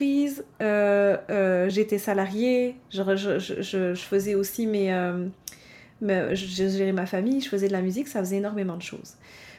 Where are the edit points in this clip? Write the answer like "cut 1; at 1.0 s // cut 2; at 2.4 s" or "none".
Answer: none